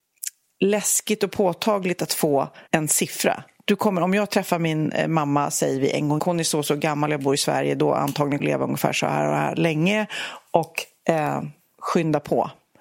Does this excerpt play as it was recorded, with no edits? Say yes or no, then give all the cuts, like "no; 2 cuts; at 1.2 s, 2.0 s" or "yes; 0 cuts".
no; 3 cuts; at 2.7 s, 6.2 s, 8.4 s